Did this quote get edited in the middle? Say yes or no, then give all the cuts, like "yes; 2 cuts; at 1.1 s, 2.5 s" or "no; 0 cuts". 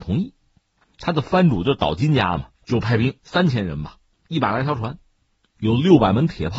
yes; 2 cuts; at 2.6 s, 3.2 s